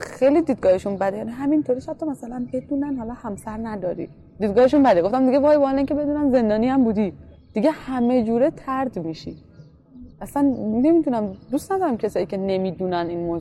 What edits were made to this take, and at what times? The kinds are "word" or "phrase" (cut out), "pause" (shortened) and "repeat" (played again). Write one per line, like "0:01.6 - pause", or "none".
0:07.4 - pause
0:10.1 - pause